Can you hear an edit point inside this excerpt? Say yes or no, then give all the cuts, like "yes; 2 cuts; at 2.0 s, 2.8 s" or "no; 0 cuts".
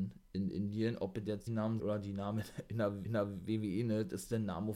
yes; 3 cuts; at 1.5 s, 1.8 s, 3.0 s